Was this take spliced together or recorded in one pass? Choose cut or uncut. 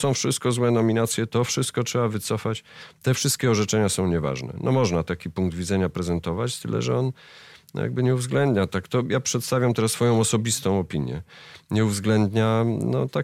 uncut